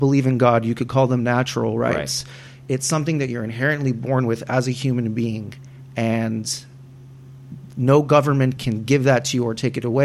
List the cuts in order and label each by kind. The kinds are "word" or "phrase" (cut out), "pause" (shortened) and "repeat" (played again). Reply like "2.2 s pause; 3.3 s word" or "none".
none

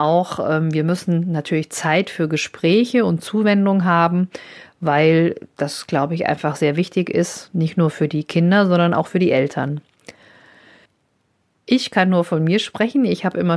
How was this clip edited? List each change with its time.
none

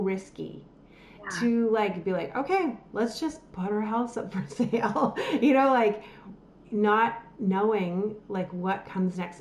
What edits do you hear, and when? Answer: none

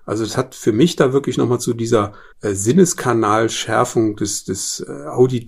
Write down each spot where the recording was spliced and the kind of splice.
2.3 s pause

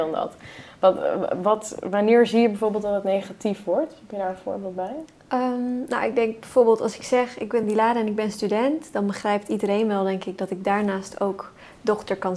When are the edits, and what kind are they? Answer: none

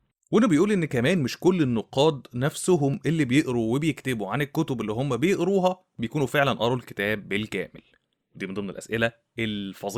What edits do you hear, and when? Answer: none

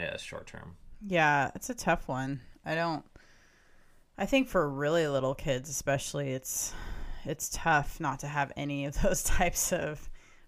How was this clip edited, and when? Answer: none

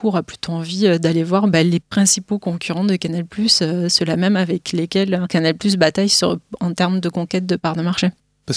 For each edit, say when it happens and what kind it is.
none

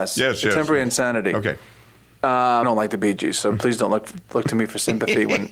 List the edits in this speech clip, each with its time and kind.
2.6 s phrase

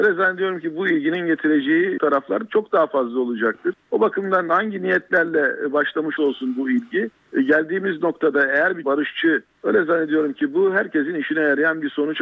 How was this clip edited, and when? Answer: 2.0 s word; 6.2 s word; 8.8 s phrase; 9.5 s phrase

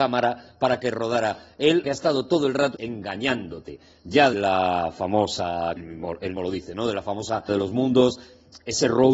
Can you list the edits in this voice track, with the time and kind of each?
1.8 s word; 2.7 s word; 4.3 s word; 5.8 s word; 6.4 s word; 7.5 s word

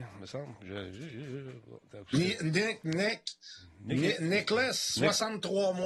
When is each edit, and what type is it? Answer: 2.8 s word

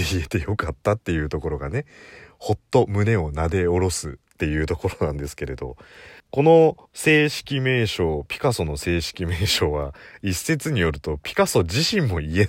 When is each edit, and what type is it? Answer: 4.2 s pause; 6.2 s pause; 6.9 s pause

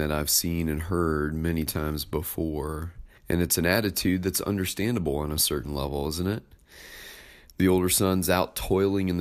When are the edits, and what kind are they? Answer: 3.2 s pause

